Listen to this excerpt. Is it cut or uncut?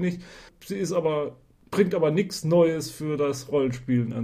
uncut